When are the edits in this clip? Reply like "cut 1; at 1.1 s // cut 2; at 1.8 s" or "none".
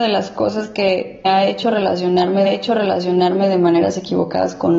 cut 1; at 1.2 s // cut 2; at 2.5 s